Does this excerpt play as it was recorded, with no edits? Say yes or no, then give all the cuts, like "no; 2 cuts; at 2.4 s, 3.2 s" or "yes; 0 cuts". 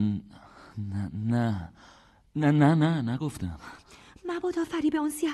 yes; 0 cuts